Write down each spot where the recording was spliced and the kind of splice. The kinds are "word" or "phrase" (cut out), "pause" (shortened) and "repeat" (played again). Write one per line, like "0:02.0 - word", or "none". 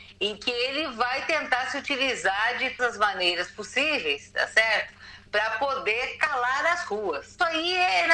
0:02.8 - word

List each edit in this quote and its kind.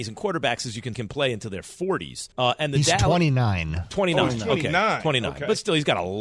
0:00.9 - word
0:02.3 - pause

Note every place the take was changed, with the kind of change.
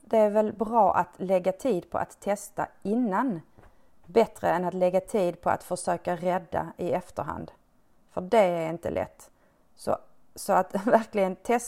none

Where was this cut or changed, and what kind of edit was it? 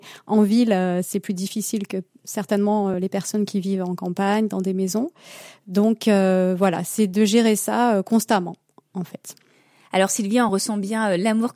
none

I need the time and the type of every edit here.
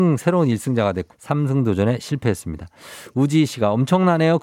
0:01.1 - phrase

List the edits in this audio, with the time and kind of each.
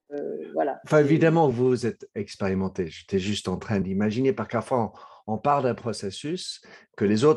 none

